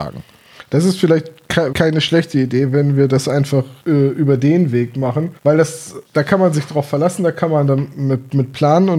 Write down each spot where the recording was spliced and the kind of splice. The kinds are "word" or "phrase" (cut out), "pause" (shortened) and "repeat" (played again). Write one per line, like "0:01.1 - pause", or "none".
0:01.7 - word
0:03.8 - pause
0:05.4 - pause
0:06.1 - pause